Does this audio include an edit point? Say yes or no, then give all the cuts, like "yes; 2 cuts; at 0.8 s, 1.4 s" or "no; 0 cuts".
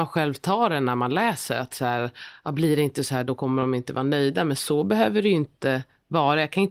no; 0 cuts